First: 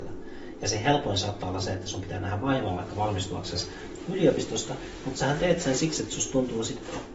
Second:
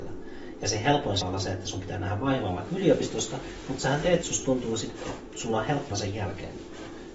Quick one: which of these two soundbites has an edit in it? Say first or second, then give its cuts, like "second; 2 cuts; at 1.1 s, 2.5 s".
second; 4 cuts; at 1.2 s, 2.7 s, 4.2 s, 5.9 s